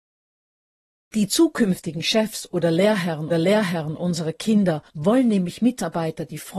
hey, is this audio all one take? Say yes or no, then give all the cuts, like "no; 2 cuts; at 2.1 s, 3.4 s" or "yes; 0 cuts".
no; 2 cuts; at 3.3 s, 4.9 s